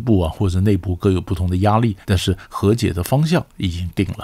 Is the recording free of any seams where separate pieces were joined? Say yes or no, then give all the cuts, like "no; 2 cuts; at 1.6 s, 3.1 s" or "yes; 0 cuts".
no; 1 cut; at 2.0 s